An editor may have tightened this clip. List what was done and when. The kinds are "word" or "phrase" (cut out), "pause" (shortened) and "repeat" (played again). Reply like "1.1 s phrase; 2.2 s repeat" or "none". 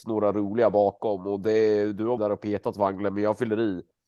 2.2 s word

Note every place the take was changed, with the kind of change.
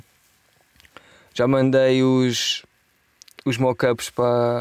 none

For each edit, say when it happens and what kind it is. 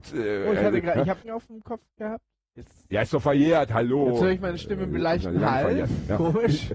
1.2 s phrase; 1.9 s pause

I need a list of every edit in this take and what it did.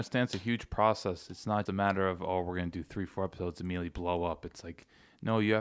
1.7 s word

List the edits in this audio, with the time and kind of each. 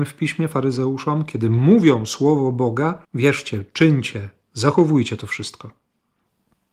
3.0 s pause

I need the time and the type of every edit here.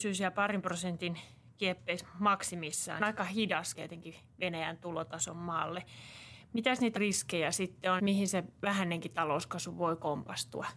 3.0 s phrase; 3.7 s word; 7.0 s word; 8.0 s word

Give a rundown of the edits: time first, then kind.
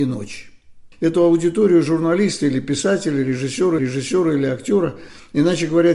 3.8 s repeat

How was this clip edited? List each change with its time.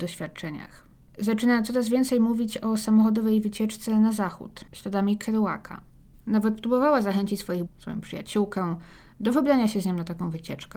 7.7 s word

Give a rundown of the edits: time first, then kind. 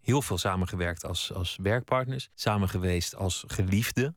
2.3 s pause

